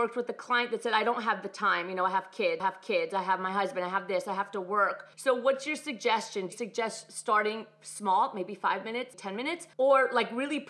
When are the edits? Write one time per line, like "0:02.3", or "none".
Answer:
0:02.6
0:05.1
0:06.5
0:09.1
0:09.7